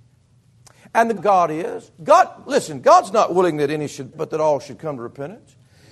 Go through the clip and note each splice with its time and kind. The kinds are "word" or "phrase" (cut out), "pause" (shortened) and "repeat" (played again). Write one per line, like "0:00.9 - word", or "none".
0:01.2 - phrase
0:01.9 - pause
0:04.1 - word

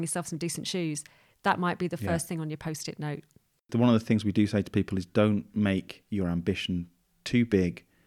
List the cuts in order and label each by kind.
none

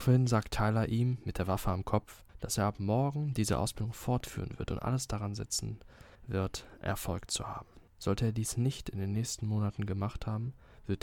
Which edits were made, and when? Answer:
0:02.3 - pause
0:06.2 - pause
0:07.9 - pause

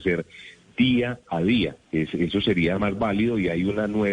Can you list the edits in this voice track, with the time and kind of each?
0:01.8 - pause

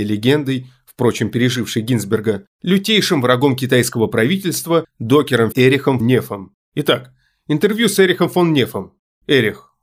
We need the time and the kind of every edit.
0:05.5 - word
0:06.0 - word
0:06.6 - pause

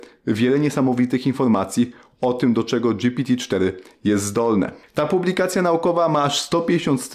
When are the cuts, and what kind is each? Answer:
none

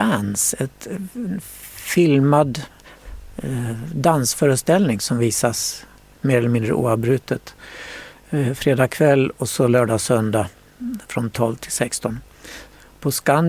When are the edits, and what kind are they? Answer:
none

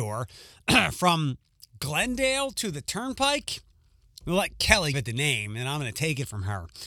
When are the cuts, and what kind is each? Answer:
0:04.9 - word

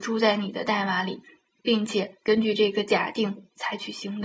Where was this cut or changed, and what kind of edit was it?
none

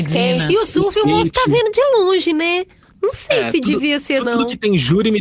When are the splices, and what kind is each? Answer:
0:04.2 - word

